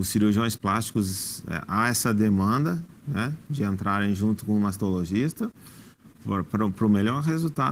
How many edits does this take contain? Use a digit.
1